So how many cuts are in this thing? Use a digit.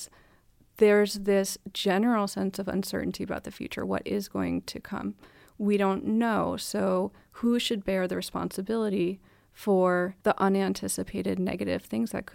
1